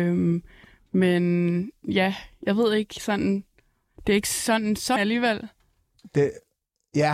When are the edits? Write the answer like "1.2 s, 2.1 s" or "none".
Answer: 5.0 s